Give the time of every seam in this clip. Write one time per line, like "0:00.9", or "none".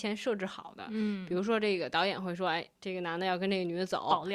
0:02.8